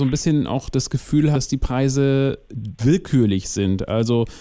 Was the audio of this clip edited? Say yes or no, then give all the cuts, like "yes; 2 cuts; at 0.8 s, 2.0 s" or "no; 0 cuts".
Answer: yes; 2 cuts; at 1.4 s, 2.8 s